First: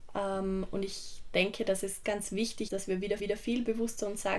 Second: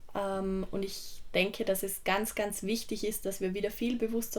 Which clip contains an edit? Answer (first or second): first